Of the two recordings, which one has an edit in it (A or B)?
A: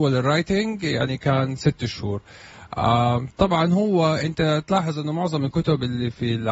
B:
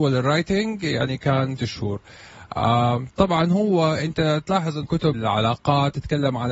B